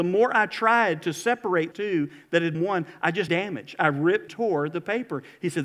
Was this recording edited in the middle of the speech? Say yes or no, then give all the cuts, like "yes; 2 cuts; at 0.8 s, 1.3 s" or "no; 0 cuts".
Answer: yes; 4 cuts; at 1.7 s, 2.5 s, 3.3 s, 4.3 s